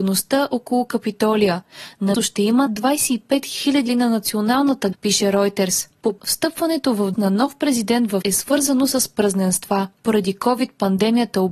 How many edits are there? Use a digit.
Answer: 7